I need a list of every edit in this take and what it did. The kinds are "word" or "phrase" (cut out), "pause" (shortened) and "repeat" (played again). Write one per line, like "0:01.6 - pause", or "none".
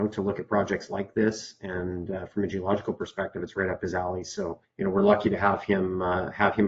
0:04.6 - pause